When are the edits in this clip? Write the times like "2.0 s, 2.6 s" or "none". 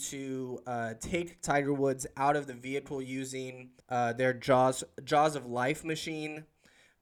3.8 s

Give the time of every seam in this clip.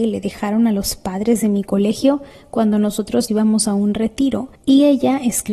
3.3 s

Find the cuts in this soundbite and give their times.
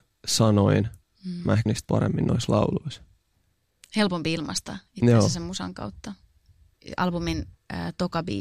1.7 s

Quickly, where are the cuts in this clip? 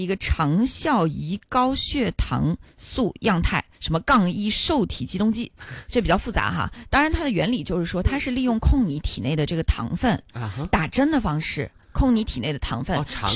3.7 s

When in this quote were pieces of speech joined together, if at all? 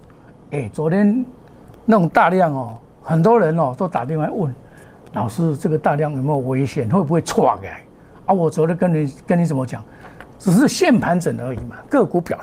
2.8 s

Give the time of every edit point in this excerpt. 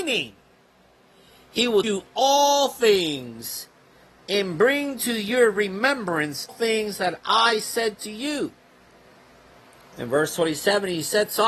1.8 s, 6.5 s

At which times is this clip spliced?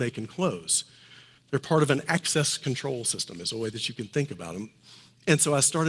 1.4 s

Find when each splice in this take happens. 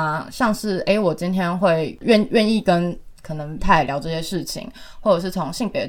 3.6 s

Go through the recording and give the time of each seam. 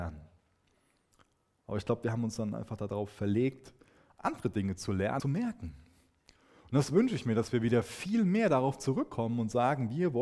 5.2 s

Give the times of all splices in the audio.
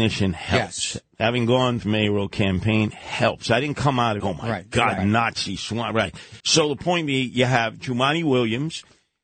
1.8 s, 4.2 s, 5.0 s, 6.4 s

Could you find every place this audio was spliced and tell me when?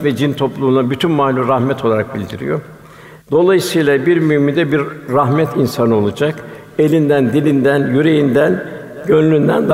3.2 s

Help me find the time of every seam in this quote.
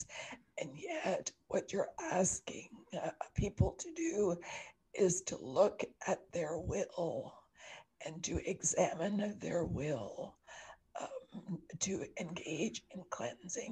none

